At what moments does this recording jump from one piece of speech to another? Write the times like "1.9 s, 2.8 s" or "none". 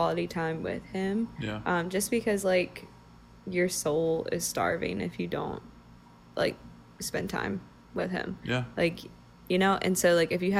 none